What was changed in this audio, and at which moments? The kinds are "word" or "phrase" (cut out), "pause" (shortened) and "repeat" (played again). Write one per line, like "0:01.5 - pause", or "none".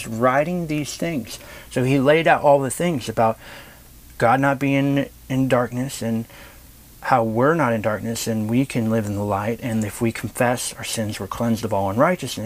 none